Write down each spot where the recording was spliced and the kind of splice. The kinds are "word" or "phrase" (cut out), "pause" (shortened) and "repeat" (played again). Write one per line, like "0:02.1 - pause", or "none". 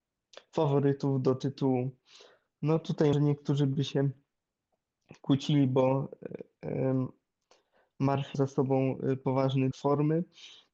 0:03.1 - word
0:08.3 - word
0:09.7 - word